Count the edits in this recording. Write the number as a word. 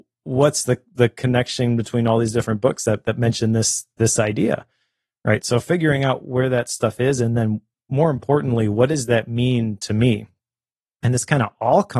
zero